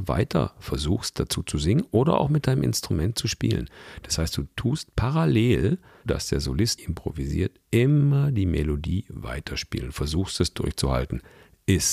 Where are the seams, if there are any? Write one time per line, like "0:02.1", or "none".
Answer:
0:06.1
0:06.8